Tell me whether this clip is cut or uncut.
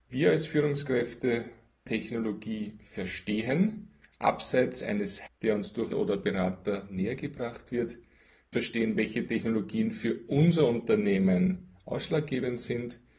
cut